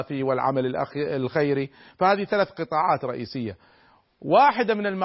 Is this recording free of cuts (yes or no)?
yes